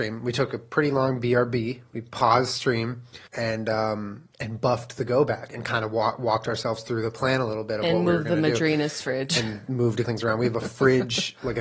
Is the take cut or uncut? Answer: cut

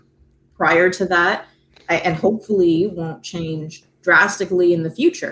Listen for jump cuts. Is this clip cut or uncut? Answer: uncut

